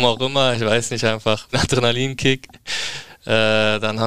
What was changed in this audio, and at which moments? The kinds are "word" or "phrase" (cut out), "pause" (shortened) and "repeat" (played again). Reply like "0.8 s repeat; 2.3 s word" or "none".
1.5 s phrase

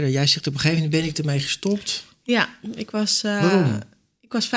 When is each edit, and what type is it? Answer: none

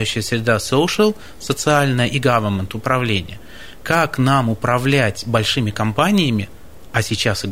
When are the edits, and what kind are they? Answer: none

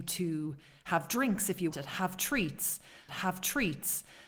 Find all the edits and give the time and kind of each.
1.7 s word; 3.1 s repeat

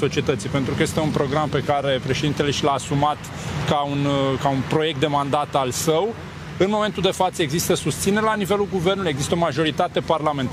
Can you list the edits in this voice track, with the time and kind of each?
none

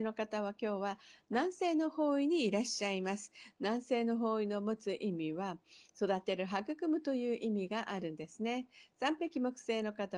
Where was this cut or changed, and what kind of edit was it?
none

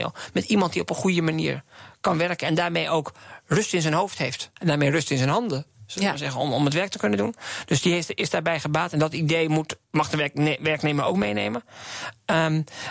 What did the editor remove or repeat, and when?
4.6 s pause; 9.8 s pause

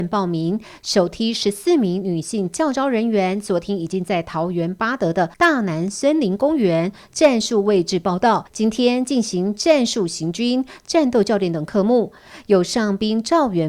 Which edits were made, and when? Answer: 5.3 s pause; 8.5 s pause

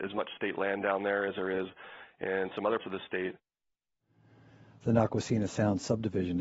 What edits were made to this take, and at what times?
2.8 s word

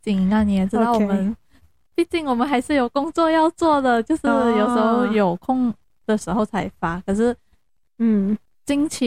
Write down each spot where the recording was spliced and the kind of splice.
none

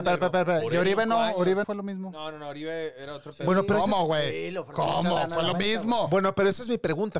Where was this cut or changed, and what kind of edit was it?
1.6 s word

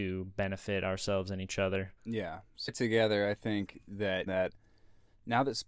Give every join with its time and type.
2.0 s pause; 2.7 s phrase; 4.3 s phrase

